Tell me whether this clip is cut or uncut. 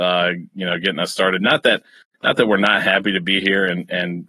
uncut